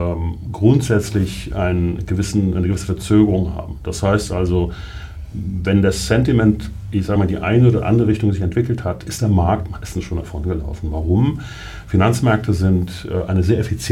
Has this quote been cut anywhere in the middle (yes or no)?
no